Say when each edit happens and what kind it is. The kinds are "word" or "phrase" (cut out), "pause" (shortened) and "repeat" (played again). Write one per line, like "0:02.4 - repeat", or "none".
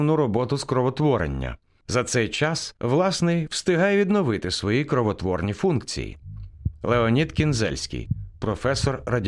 none